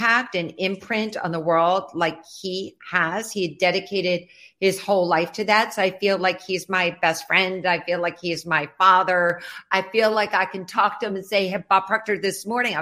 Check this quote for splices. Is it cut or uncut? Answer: uncut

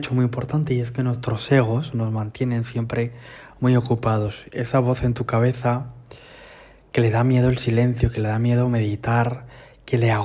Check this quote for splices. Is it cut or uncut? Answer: uncut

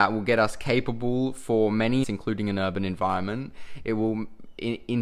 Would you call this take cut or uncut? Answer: cut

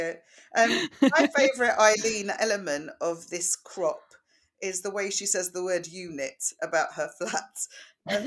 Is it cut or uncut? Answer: uncut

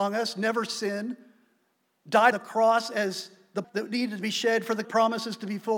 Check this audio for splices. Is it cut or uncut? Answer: cut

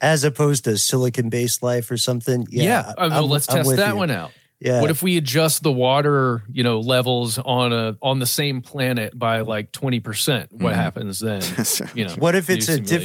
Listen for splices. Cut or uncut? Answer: uncut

